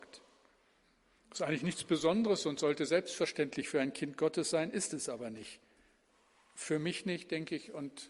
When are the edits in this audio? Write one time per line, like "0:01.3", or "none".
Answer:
none